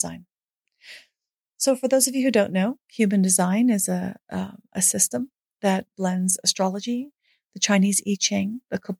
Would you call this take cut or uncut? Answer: uncut